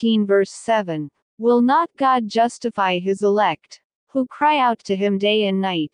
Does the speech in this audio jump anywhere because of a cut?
no; 0 cuts

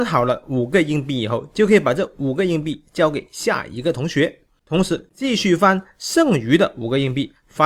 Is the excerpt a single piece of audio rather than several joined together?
yes; 0 cuts

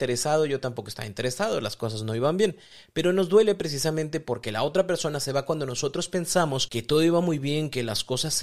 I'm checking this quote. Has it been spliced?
no; 0 cuts

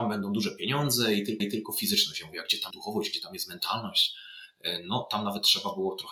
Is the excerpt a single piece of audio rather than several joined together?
no; 2 cuts; at 1.4 s, 2.7 s

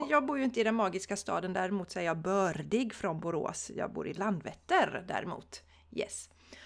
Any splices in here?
no; 0 cuts

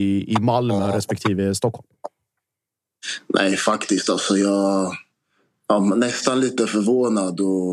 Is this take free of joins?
yes; 0 cuts

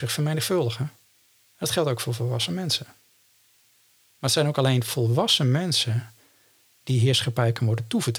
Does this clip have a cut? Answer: no; 0 cuts

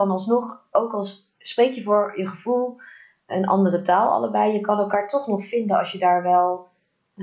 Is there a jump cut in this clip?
no; 0 cuts

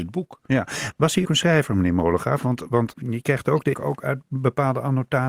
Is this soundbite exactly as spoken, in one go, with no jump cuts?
no; 3 cuts; at 1.2 s, 2.9 s, 3.7 s

